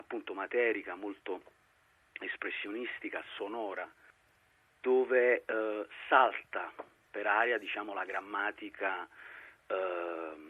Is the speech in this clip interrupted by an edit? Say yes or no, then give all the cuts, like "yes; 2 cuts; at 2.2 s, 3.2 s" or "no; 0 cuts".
no; 0 cuts